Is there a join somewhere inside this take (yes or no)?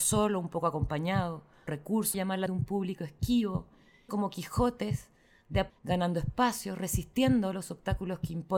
yes